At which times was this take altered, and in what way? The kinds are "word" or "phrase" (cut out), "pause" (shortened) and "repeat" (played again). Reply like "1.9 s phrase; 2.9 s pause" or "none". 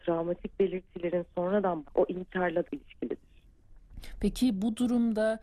1.8 s word; 2.6 s word